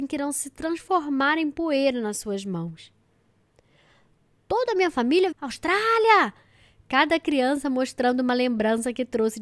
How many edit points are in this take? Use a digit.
1